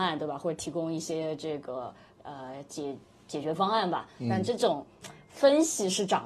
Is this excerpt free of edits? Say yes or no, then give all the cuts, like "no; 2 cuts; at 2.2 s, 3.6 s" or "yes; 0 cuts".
yes; 0 cuts